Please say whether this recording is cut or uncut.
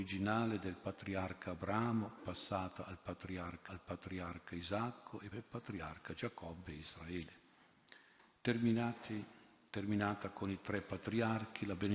cut